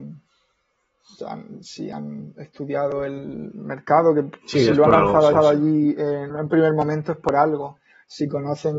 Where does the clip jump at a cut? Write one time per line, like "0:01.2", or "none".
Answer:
0:01.2
0:05.3
0:06.3